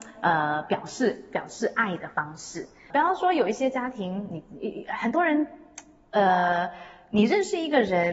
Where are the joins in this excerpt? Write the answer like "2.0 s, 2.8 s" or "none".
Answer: 2.9 s